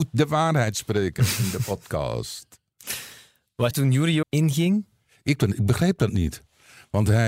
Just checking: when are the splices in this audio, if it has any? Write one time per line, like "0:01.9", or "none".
0:03.7
0:04.2
0:05.4